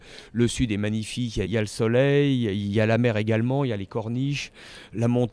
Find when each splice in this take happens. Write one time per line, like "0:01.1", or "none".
0:01.5